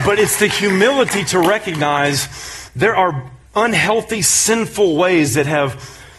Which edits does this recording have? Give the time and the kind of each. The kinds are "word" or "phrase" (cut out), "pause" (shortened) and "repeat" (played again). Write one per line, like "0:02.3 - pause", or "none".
0:03.5 - pause